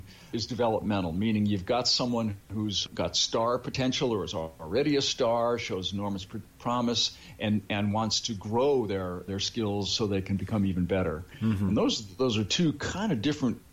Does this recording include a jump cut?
yes; 1 cut; at 2.4 s

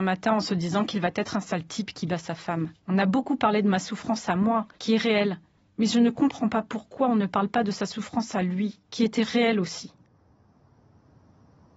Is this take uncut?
no; 4 cuts; at 2.8 s, 4.7 s, 5.6 s, 8.8 s

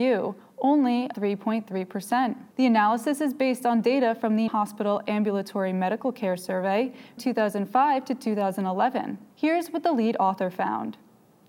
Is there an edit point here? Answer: yes; 5 cuts; at 1.1 s, 2.5 s, 4.5 s, 7.2 s, 9.3 s

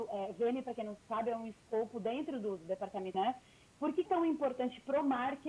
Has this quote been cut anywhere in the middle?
yes; 2 cuts; at 3.1 s, 4.1 s

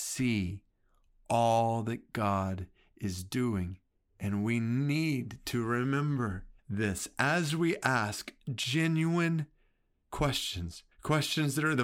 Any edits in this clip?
yes; 3 cuts; at 3.9 s, 6.6 s, 10.9 s

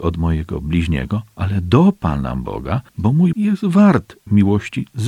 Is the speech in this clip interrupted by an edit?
yes; 2 cuts; at 2.9 s, 3.3 s

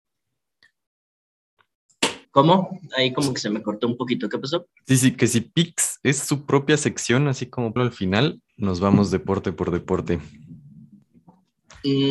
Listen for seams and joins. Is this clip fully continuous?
no; 3 cuts; at 2.2 s, 7.8 s, 8.5 s

